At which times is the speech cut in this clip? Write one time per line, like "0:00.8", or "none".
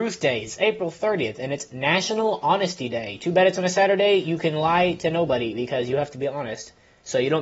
none